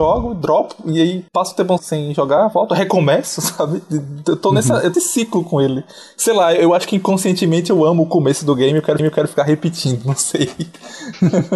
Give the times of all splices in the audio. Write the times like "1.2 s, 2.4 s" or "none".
1.8 s, 4.9 s, 9.0 s